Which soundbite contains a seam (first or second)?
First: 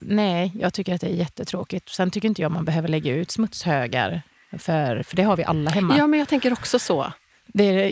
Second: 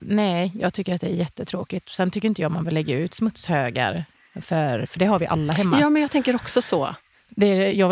second